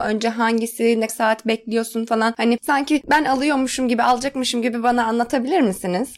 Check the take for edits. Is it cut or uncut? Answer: cut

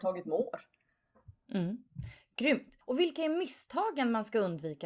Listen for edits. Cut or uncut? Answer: cut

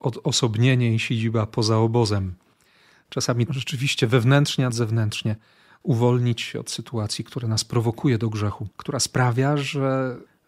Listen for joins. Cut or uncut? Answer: cut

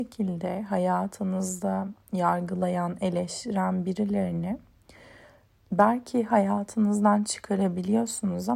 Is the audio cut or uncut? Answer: uncut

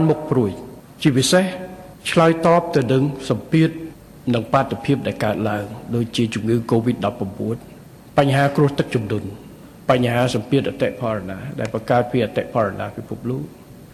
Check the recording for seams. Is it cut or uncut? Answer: uncut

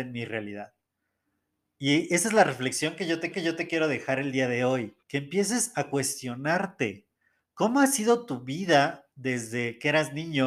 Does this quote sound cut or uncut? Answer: cut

